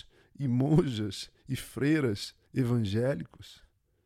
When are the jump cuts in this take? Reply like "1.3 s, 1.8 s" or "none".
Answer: 2.4 s